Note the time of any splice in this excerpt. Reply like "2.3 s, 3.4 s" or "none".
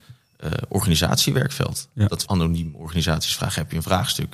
2.3 s